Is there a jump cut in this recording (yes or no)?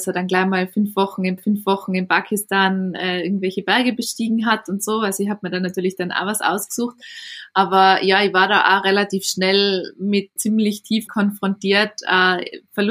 yes